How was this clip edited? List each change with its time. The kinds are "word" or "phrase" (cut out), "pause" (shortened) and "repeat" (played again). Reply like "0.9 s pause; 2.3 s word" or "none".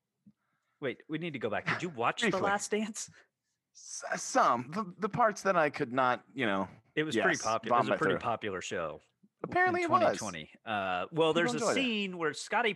none